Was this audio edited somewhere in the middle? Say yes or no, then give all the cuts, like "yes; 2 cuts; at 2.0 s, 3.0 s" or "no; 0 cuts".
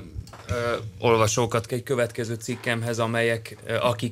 yes; 1 cut; at 1.7 s